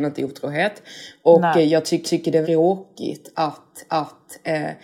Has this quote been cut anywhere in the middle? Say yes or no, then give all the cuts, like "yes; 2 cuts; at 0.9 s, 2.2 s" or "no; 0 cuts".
yes; 3 cuts; at 2.0 s, 2.4 s, 3.9 s